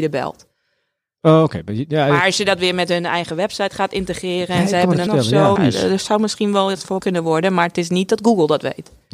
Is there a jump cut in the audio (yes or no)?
yes